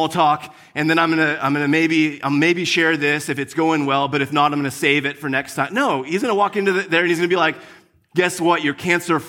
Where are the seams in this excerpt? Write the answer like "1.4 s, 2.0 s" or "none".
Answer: none